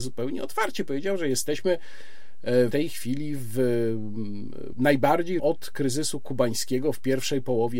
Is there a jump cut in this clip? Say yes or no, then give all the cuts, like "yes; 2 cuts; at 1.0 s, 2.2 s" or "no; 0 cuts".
yes; 3 cuts; at 2.7 s, 4.7 s, 5.4 s